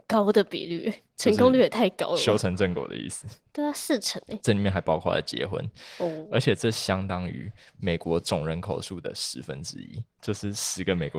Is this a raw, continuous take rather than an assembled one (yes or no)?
yes